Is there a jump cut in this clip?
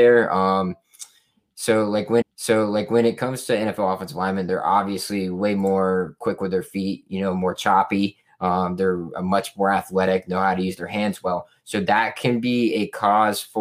yes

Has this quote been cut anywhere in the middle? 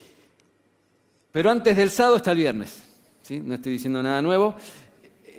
no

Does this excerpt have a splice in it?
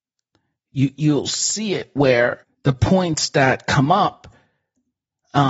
yes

